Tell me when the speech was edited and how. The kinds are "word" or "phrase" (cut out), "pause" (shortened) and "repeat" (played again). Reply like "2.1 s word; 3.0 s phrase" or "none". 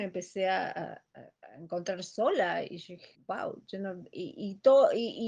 3.1 s pause